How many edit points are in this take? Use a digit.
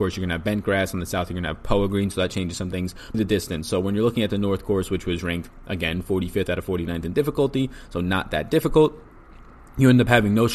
1